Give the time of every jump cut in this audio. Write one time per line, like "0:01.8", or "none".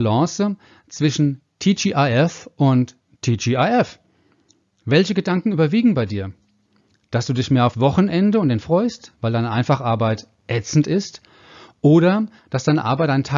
0:07.7
0:08.6